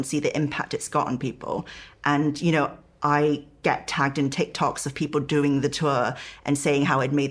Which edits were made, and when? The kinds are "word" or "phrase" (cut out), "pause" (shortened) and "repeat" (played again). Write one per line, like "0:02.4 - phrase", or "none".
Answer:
none